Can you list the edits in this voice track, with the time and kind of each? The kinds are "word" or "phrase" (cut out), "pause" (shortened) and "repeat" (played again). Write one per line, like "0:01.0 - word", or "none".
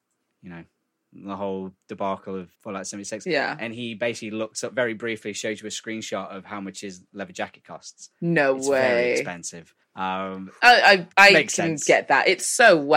0:02.5 - pause
0:09.8 - pause
0:11.1 - pause